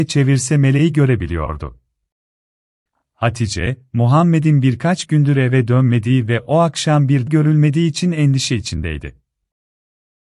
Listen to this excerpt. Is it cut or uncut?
cut